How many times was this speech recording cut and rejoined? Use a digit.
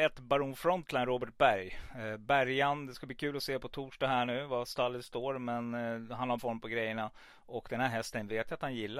1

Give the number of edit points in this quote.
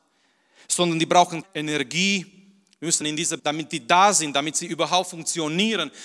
3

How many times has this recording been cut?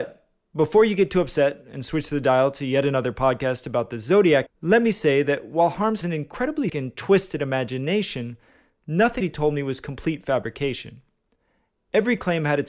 4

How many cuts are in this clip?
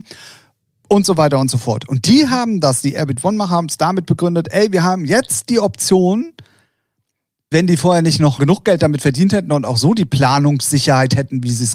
2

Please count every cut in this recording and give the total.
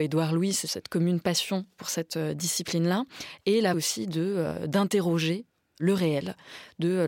1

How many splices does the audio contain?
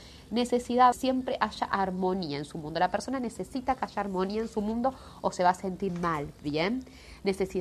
2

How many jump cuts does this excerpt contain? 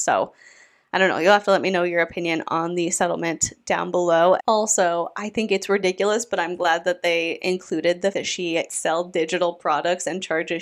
2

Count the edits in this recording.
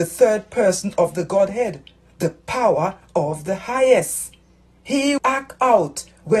1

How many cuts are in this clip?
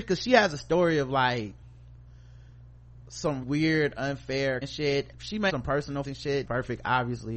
6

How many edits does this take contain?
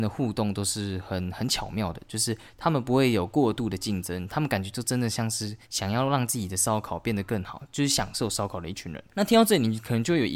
2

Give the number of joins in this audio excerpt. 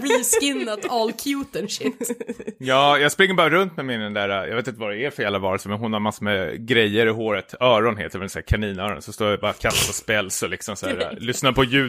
0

